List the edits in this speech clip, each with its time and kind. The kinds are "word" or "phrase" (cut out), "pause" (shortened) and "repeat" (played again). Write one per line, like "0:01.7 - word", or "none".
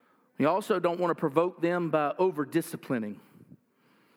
none